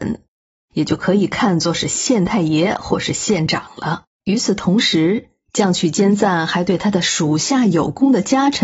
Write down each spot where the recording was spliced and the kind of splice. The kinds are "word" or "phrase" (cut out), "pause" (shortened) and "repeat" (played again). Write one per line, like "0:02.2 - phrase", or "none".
0:04.1 - pause